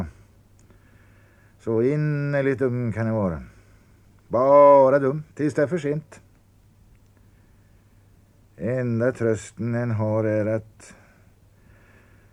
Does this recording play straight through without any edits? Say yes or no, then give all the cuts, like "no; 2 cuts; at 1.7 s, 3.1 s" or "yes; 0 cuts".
no; 1 cut; at 5.3 s